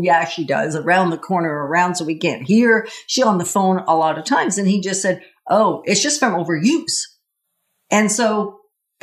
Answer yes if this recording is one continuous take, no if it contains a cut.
yes